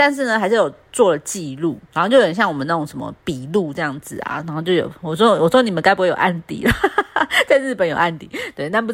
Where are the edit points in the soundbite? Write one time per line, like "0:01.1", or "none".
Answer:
0:01.9